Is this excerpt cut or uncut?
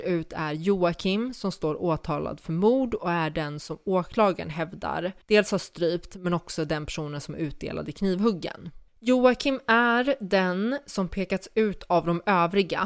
cut